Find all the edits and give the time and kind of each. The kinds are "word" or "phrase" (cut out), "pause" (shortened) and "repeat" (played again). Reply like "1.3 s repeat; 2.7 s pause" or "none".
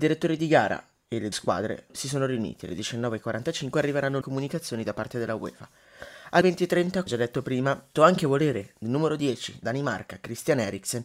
1.3 s word; 4.2 s word; 6.4 s word; 7.1 s word; 7.9 s word; 9.6 s word